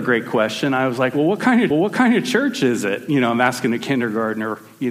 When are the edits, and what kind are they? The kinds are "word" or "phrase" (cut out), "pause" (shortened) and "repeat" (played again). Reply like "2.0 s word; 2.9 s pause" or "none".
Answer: 1.7 s repeat